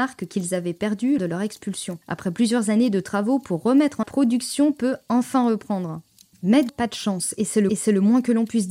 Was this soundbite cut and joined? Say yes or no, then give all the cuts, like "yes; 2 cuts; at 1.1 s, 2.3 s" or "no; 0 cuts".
yes; 6 cuts; at 1.2 s, 2.0 s, 4.0 s, 6.1 s, 6.7 s, 7.7 s